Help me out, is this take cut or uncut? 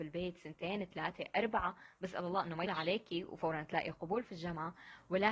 cut